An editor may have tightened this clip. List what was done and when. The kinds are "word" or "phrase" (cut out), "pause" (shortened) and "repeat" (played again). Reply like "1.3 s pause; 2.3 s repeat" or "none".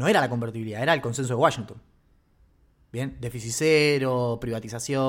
none